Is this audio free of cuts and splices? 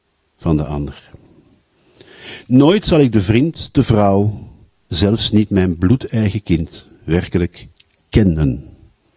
yes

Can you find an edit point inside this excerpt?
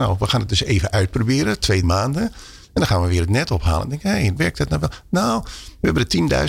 yes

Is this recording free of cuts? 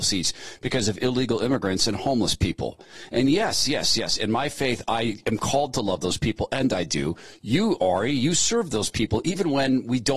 yes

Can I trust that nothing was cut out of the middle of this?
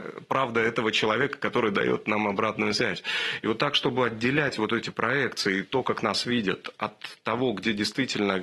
yes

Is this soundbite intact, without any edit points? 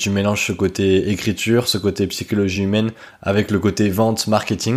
yes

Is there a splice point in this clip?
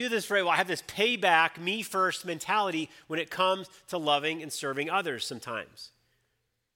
no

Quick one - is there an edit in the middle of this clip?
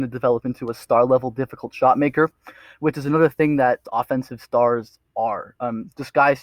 yes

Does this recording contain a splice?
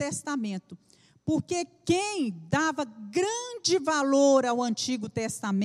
no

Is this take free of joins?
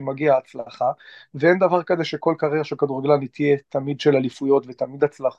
yes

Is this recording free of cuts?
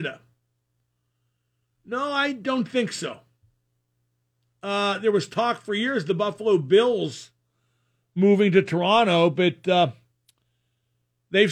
yes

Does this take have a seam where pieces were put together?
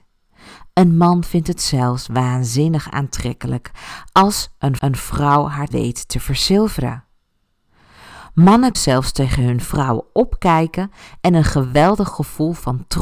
yes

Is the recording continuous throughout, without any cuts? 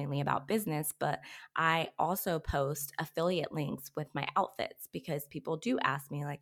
yes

